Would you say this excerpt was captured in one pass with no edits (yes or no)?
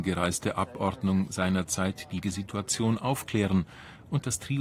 no